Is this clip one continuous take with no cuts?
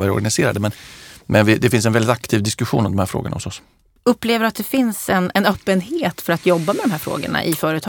yes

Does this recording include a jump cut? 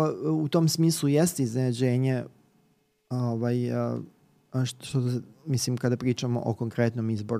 no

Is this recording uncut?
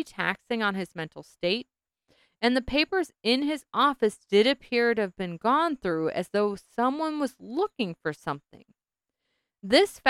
yes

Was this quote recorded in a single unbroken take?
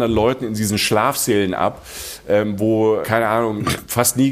no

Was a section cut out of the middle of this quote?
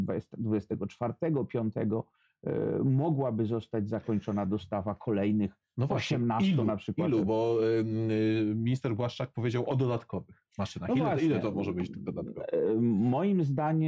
no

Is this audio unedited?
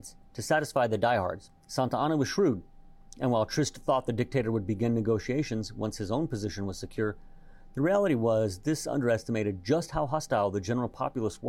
no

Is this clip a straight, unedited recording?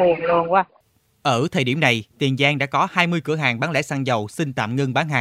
no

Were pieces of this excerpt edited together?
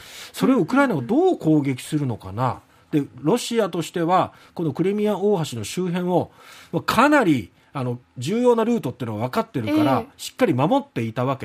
yes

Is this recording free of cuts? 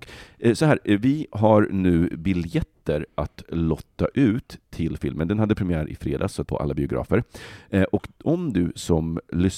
no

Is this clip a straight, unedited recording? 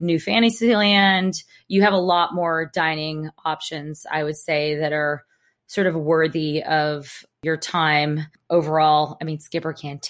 yes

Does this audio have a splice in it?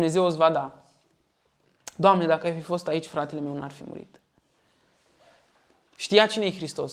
no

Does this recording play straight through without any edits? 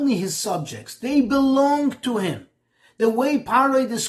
yes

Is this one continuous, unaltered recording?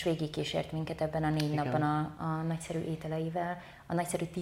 yes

